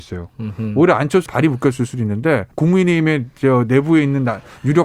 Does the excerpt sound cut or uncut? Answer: cut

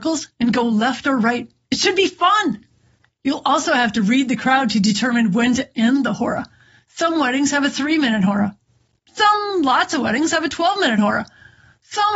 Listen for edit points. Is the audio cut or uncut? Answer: uncut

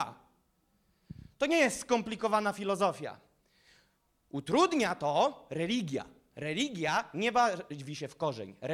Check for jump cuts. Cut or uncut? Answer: uncut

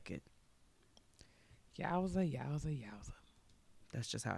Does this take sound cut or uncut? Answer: uncut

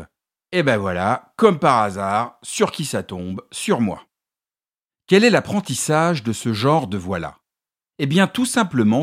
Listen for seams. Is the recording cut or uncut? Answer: uncut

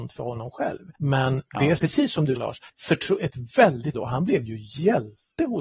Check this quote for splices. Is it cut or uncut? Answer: cut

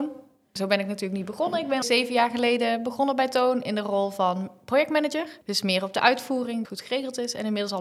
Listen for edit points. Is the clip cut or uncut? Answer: cut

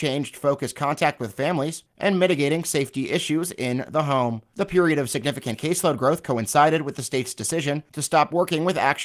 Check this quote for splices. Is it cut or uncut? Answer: uncut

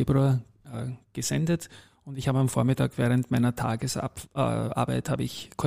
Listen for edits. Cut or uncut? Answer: uncut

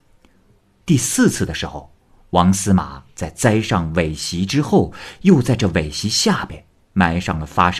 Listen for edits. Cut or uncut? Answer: uncut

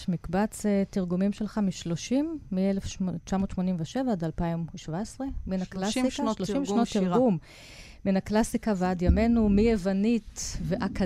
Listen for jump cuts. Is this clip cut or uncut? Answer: uncut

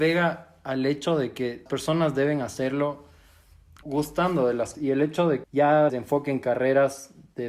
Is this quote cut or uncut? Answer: cut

